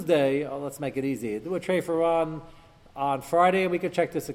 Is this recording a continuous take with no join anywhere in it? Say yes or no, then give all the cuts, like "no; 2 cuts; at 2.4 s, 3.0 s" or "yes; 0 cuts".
yes; 0 cuts